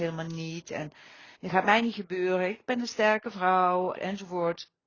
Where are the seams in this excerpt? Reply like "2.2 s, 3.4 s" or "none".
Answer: 1.3 s, 3.9 s

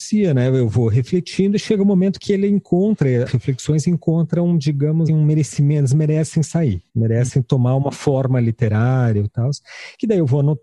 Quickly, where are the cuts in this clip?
3.3 s, 5.1 s, 6.9 s

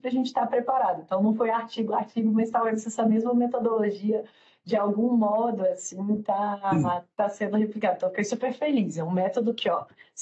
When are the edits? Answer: none

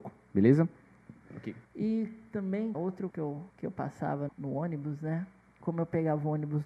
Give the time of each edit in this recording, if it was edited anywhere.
1.6 s, 2.7 s, 3.1 s, 3.5 s, 4.3 s

